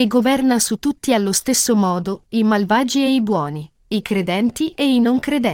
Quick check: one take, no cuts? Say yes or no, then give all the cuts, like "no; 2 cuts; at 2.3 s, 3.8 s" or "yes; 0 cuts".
yes; 0 cuts